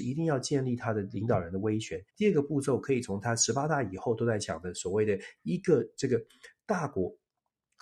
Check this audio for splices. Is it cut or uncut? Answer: cut